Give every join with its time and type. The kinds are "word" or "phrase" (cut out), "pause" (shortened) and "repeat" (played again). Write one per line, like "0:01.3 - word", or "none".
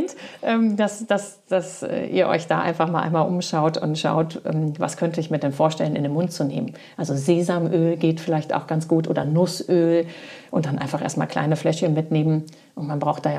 none